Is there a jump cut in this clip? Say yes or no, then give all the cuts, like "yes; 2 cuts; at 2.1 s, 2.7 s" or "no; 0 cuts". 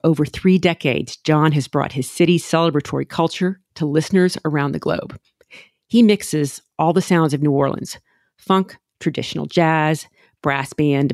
no; 0 cuts